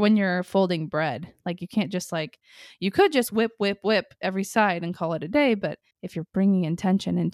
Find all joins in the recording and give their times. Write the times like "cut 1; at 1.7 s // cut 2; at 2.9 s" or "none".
cut 1; at 5.9 s